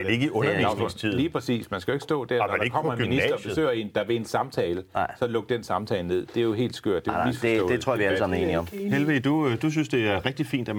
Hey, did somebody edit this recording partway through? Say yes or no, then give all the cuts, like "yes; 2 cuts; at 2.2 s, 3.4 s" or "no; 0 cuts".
no; 0 cuts